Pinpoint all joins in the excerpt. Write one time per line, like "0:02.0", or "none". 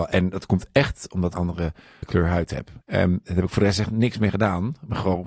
0:01.3
0:02.0
0:02.8